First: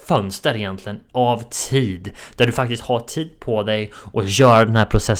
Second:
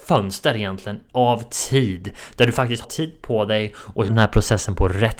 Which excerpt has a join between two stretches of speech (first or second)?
second